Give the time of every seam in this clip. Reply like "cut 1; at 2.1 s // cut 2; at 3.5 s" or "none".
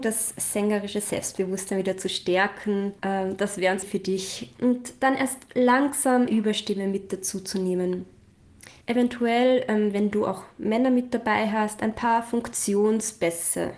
cut 1; at 3.0 s // cut 2; at 3.8 s // cut 3; at 6.3 s // cut 4; at 8.8 s